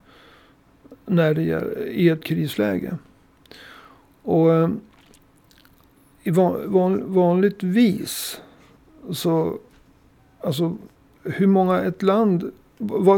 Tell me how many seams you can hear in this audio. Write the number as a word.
zero